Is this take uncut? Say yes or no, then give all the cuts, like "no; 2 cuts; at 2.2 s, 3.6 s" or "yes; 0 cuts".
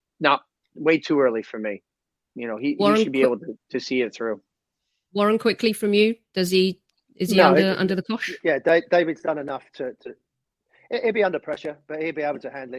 yes; 0 cuts